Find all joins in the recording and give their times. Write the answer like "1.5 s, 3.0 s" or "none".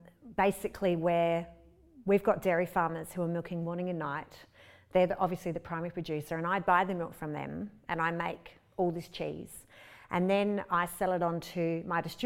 none